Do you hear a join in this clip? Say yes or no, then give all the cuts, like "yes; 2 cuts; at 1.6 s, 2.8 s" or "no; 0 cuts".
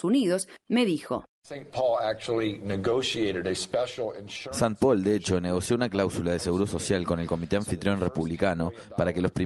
no; 0 cuts